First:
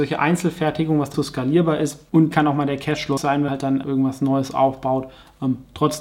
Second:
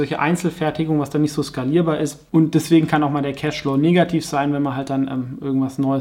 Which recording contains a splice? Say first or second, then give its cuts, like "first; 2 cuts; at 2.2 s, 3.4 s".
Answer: first; 5 cuts; at 1.1 s, 2.3 s, 3.2 s, 3.5 s, 3.8 s